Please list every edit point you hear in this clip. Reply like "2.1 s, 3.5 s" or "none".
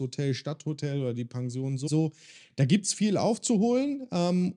1.9 s